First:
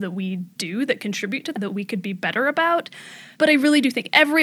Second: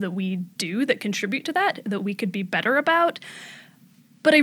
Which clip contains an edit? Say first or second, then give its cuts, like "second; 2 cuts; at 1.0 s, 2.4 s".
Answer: first; 2 cuts; at 1.5 s, 3.3 s